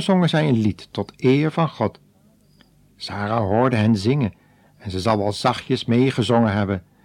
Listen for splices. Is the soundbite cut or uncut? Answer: uncut